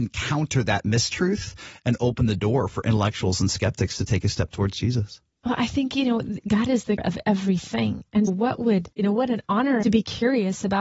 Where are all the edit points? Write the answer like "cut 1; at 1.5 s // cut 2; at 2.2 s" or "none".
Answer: cut 1; at 7.0 s // cut 2; at 8.3 s // cut 3; at 8.9 s // cut 4; at 9.8 s